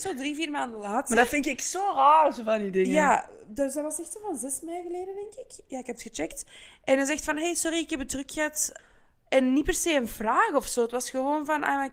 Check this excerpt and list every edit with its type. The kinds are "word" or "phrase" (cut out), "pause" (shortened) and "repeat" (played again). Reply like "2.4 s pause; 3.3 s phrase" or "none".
none